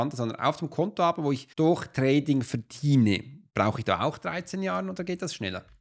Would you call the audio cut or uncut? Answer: cut